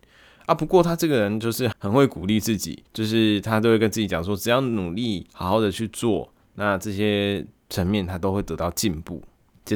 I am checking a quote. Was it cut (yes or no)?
yes